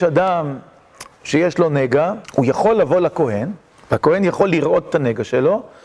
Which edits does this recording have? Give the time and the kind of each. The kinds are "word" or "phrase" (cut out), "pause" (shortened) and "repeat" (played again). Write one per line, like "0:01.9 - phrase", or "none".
0:02.2 - pause
0:03.7 - pause